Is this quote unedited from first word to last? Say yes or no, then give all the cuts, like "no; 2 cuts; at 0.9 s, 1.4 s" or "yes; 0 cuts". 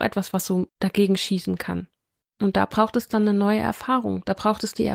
yes; 0 cuts